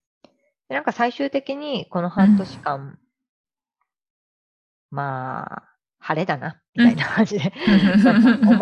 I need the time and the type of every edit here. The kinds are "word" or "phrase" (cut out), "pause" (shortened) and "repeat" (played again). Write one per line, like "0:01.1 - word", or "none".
0:05.8 - pause
0:06.7 - pause